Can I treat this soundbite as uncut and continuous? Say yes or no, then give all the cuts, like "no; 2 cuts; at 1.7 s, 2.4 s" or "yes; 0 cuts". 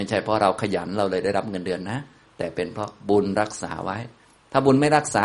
yes; 0 cuts